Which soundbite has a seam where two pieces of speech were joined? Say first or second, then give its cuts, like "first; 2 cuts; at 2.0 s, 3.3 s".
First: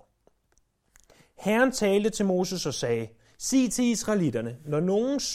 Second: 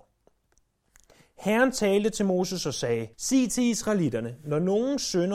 second; 1 cut; at 3.1 s